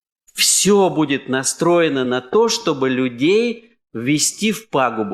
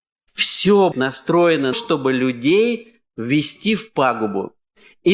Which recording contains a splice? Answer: second; 2 cuts; at 0.9 s, 1.7 s

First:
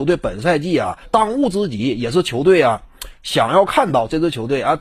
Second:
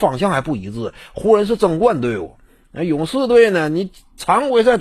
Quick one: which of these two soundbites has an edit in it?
first; 1 cut; at 1.0 s

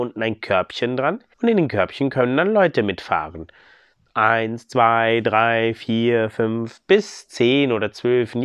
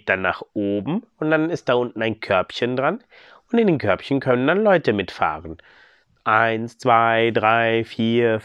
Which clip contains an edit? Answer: first; 1 cut; at 1.3 s

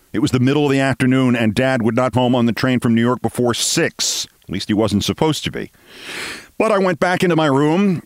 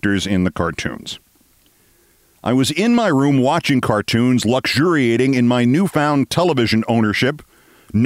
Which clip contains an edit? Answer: first; 2 cuts; at 2.1 s, 4.4 s

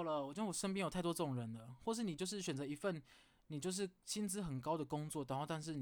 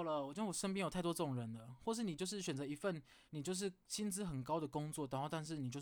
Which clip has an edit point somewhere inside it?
second; 1 cut; at 3.3 s

